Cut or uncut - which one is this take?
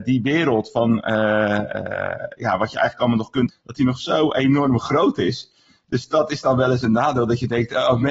cut